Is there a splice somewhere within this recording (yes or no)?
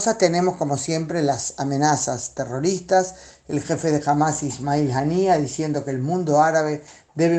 no